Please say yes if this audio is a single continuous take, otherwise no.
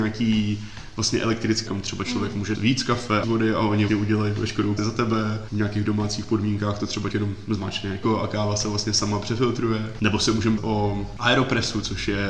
no